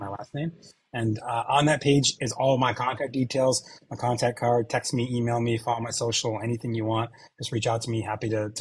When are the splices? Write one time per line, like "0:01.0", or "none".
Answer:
none